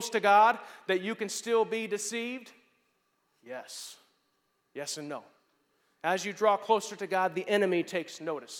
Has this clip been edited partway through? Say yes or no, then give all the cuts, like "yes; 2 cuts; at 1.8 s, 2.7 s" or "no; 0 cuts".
no; 0 cuts